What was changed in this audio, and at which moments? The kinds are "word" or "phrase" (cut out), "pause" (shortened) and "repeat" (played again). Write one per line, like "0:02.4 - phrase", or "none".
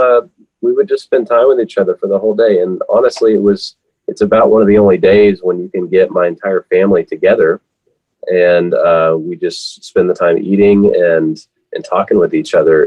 none